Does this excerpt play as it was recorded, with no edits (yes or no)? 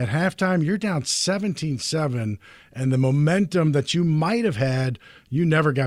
yes